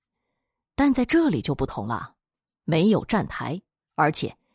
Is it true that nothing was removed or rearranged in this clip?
yes; 0 cuts

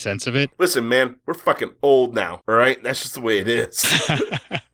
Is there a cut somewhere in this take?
no; 0 cuts

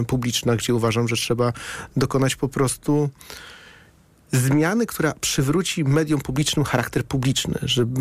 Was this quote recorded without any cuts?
yes; 0 cuts

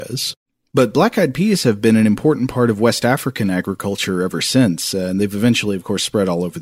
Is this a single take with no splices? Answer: yes; 0 cuts

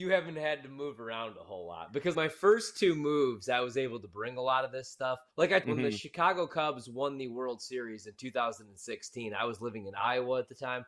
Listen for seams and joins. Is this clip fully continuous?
no; 3 cuts; at 2.1 s, 5.3 s, 5.6 s

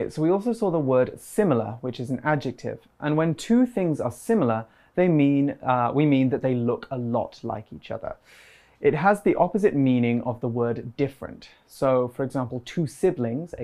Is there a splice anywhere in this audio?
no; 0 cuts

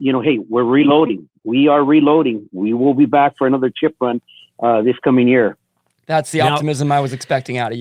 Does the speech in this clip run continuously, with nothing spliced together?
yes; 0 cuts

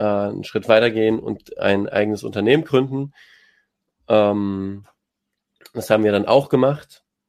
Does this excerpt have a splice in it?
no; 0 cuts

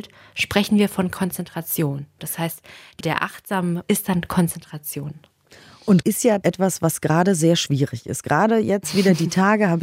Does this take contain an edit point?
yes; 4 cuts; at 3.0 s, 3.8 s, 6.0 s, 6.4 s

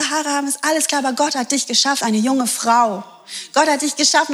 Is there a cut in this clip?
yes; 1 cut; at 2.0 s

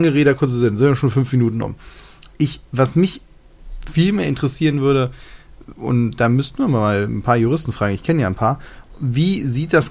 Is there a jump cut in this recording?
no; 0 cuts

